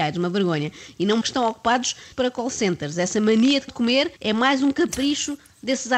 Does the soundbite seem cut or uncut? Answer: cut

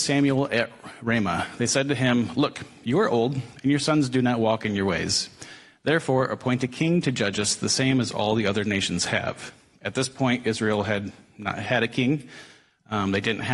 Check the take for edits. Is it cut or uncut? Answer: uncut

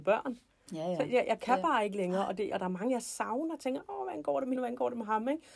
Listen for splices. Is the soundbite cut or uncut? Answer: cut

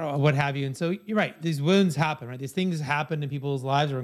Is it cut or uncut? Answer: uncut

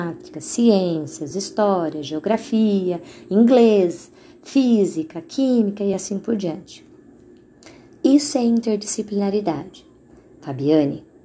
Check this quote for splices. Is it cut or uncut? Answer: uncut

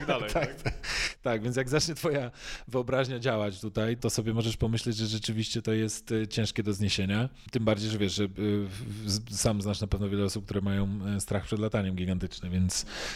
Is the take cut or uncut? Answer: cut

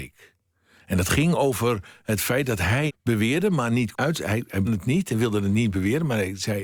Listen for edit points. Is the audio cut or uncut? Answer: cut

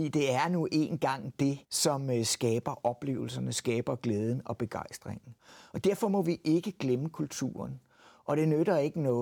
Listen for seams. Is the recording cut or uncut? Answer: cut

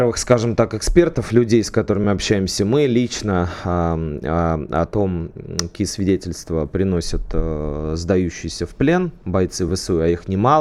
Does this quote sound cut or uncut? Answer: uncut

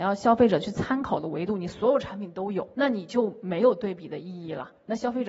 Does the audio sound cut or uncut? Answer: cut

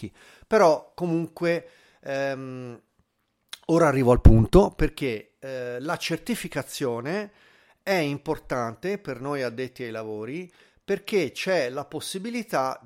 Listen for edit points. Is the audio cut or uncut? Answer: uncut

